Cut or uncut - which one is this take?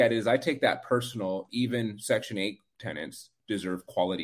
cut